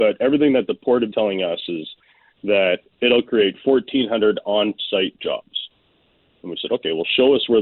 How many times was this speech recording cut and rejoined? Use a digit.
1